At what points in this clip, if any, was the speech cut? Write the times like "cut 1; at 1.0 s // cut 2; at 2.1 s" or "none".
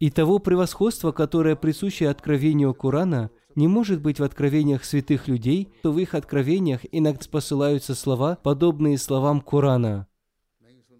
cut 1; at 3.4 s // cut 2; at 5.8 s // cut 3; at 7.2 s // cut 4; at 8.4 s